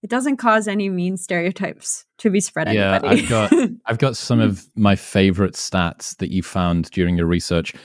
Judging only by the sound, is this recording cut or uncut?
cut